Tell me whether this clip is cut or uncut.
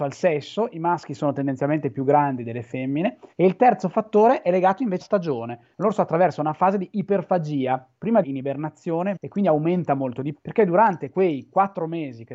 cut